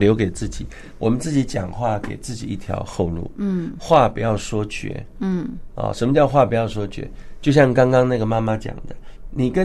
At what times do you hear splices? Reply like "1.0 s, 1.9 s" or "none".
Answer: none